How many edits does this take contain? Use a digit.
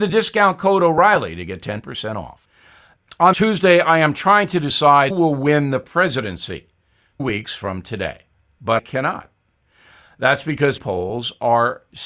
5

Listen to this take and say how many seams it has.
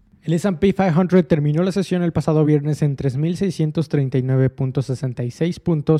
0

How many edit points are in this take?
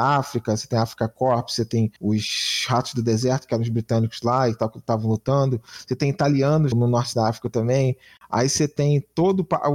2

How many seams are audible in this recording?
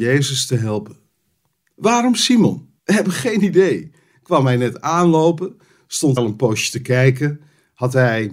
2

